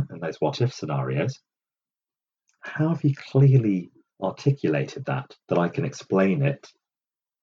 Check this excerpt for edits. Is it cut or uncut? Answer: cut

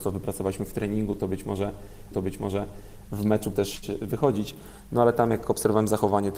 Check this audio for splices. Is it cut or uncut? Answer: cut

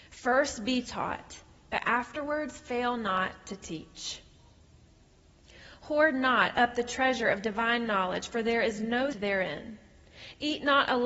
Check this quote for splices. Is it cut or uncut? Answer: cut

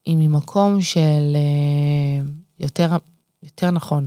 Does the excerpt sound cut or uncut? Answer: uncut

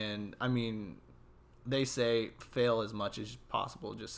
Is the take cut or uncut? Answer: uncut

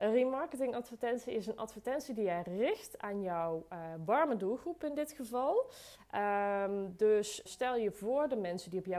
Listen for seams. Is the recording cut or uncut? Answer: cut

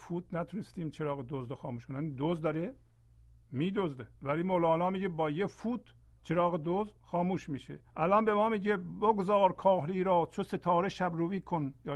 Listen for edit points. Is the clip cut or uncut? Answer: cut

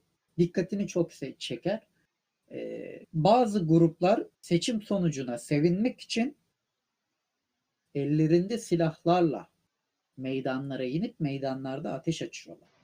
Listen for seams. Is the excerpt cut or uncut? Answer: cut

